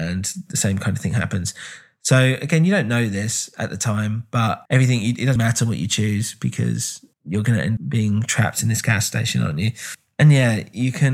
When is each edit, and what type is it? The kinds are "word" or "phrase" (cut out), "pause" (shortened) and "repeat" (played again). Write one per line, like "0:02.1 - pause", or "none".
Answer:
0:04.7 - word
0:05.4 - word
0:07.1 - pause
0:07.8 - word

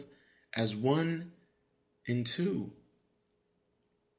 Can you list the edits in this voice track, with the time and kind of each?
none

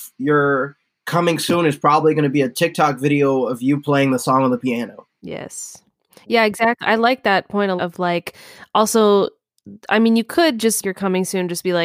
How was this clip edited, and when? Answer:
0:07.8 - word
0:10.8 - word

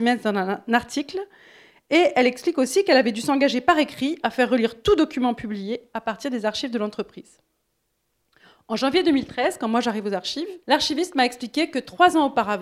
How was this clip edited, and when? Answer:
0:10.6 - pause

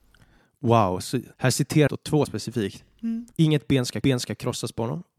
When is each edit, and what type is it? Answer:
0:01.3 - pause
0:01.9 - word
0:02.3 - word
0:03.3 - pause
0:04.0 - repeat

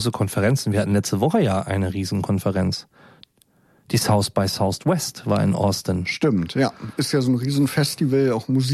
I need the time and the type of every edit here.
none

